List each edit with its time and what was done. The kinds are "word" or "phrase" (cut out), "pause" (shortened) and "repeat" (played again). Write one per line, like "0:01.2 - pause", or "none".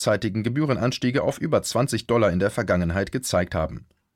none